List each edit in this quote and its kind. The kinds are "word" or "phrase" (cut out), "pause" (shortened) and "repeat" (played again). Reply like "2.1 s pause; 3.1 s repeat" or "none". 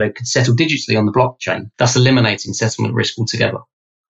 1.7 s pause